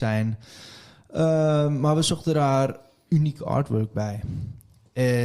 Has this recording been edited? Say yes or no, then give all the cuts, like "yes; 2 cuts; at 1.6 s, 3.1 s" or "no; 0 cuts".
no; 0 cuts